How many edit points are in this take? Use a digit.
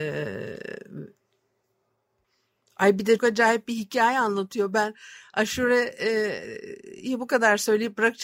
1